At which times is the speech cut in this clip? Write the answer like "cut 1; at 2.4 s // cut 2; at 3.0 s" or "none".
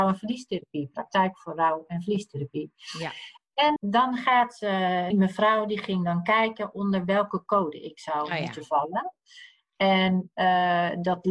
cut 1; at 3.8 s // cut 2; at 5.1 s

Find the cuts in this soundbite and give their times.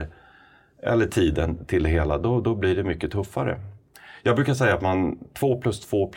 none

